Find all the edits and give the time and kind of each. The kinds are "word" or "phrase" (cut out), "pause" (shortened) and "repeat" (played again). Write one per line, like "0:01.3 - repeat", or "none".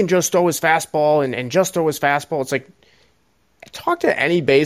none